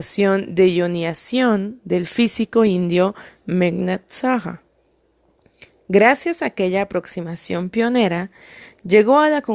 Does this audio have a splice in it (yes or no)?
no